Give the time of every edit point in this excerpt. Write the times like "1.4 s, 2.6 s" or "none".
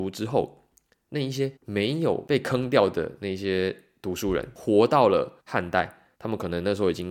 1.6 s, 5.4 s, 6.1 s